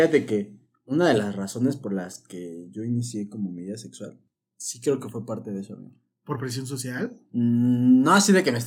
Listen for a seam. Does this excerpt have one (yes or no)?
no